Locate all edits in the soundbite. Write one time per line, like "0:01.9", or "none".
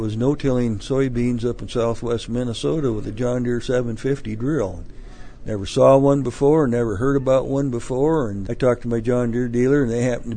0:08.5